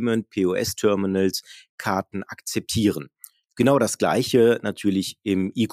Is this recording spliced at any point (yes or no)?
no